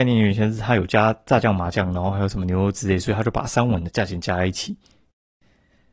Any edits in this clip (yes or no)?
no